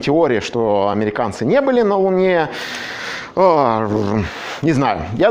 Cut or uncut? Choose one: uncut